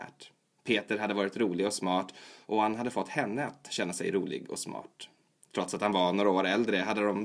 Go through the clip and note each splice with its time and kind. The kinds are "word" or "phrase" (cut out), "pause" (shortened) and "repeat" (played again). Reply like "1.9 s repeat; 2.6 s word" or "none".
none